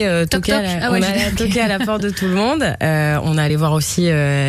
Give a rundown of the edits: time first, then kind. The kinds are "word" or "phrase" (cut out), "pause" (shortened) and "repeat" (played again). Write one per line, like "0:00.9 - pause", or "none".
none